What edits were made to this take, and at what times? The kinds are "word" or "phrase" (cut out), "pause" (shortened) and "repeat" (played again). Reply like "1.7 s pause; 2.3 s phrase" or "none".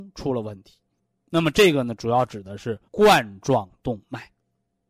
1.0 s pause; 2.9 s pause